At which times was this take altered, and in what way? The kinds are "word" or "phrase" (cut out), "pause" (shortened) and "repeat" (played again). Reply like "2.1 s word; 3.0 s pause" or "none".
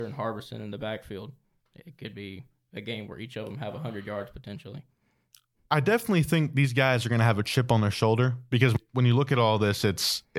none